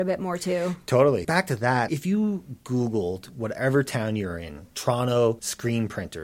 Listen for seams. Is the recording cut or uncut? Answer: uncut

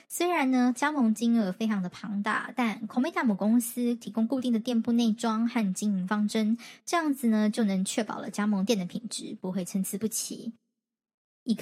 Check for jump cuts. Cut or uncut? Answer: uncut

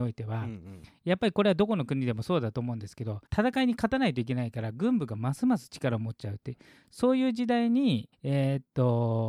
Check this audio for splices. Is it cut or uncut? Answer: cut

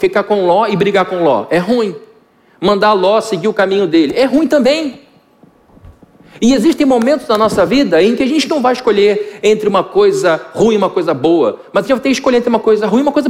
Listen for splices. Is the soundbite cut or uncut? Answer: uncut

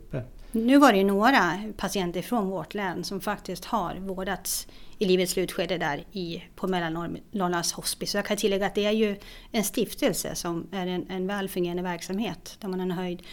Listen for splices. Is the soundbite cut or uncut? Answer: uncut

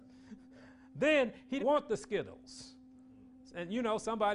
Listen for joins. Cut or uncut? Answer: cut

